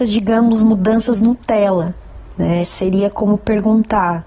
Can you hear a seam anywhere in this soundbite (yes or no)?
no